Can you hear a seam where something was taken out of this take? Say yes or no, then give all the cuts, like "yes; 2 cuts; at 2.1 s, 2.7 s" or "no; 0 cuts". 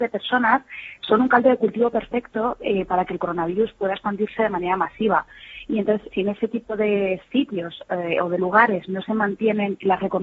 yes; 1 cut; at 6.1 s